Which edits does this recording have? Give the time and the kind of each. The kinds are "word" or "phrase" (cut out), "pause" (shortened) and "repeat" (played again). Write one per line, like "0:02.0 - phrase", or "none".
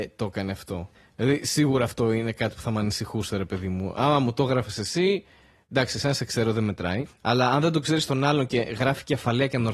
none